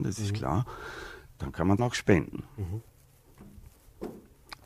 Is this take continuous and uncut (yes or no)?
no